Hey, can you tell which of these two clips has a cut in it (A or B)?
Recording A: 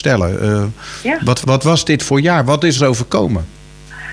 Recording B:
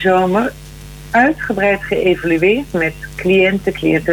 A